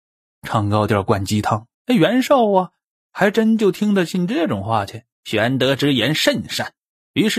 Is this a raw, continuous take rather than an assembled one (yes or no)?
no